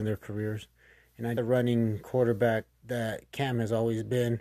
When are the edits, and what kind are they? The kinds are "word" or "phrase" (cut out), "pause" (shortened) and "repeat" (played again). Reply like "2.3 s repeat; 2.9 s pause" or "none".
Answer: 1.4 s phrase; 2.7 s pause